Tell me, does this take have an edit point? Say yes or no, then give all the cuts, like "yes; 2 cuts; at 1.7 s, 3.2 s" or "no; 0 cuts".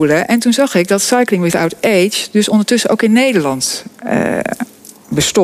no; 0 cuts